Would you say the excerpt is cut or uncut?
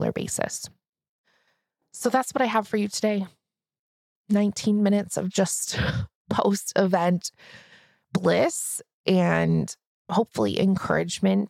uncut